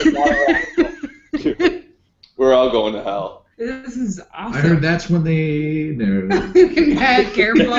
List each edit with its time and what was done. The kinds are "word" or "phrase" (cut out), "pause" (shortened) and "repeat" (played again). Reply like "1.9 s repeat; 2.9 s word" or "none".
3.5 s pause